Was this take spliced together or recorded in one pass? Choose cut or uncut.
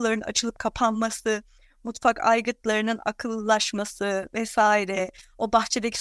uncut